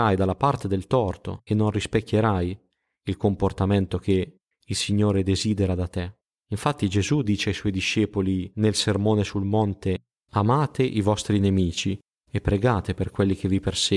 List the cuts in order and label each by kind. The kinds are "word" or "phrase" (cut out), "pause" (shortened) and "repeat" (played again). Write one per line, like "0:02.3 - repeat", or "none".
none